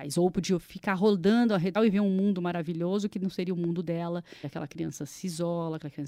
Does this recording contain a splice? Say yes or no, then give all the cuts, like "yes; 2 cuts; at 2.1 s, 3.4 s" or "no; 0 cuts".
yes; 2 cuts; at 1.8 s, 4.4 s